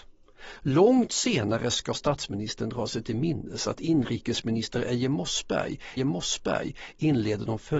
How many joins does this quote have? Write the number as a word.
one